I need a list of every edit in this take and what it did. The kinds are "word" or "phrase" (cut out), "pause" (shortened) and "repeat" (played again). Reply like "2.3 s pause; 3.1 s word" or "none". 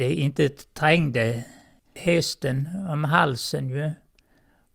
none